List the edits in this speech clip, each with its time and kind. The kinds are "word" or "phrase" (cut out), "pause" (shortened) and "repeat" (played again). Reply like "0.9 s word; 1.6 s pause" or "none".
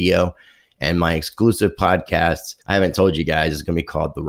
2.6 s pause